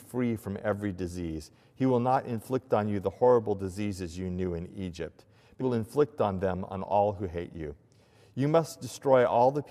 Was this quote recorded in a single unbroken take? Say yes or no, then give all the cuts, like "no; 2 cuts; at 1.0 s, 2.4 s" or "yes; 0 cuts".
no; 1 cut; at 5.6 s